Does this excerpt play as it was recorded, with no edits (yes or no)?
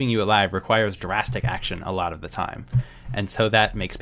yes